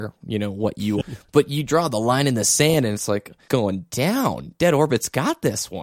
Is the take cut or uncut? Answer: cut